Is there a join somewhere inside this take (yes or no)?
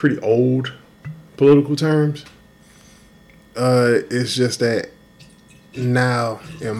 no